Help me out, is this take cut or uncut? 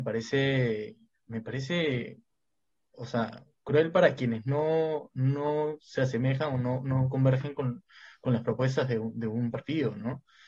uncut